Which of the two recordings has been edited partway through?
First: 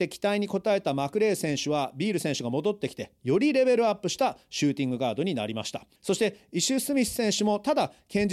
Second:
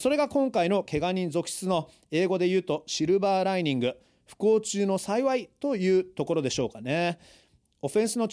first; 1 cut; at 6.0 s

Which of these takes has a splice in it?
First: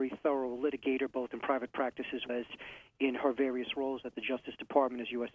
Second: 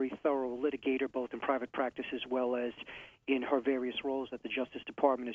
first; 1 cut; at 2.3 s

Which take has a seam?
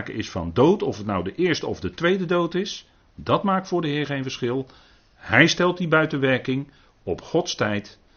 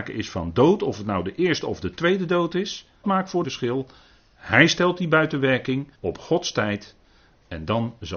second; 3 cuts; at 3.0 s, 3.4 s, 5.9 s

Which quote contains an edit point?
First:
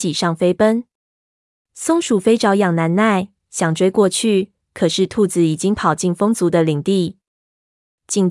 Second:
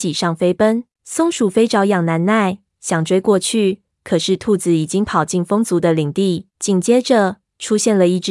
second; 2 cuts; at 0.9 s, 6.5 s

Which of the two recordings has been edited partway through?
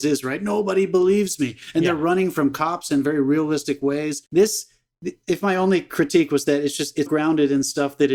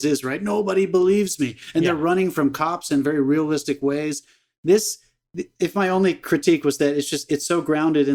first; 2 cuts; at 4.3 s, 7.1 s

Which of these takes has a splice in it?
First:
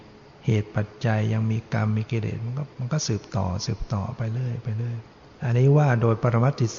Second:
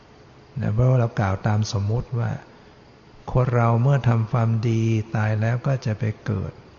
first; 2 cuts; at 2.7 s, 5.2 s

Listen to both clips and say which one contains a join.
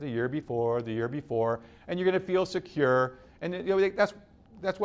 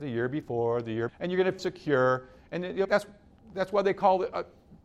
second; 3 cuts; at 1.1 s, 1.6 s, 2.8 s

